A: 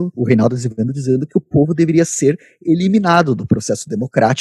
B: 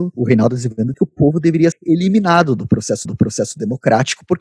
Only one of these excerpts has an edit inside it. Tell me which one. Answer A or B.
B